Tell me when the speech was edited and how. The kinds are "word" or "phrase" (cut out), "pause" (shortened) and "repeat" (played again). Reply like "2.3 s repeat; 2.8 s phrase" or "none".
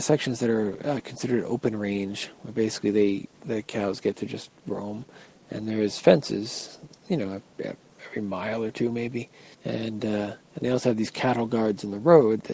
3.3 s pause; 4.6 s pause; 7.0 s pause; 7.5 s pause; 9.5 s pause